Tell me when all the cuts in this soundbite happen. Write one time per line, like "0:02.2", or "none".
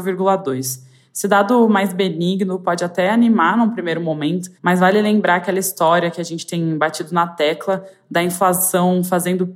0:04.6